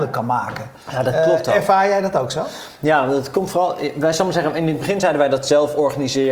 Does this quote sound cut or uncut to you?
uncut